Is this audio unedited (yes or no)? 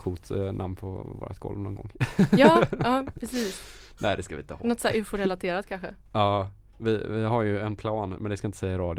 yes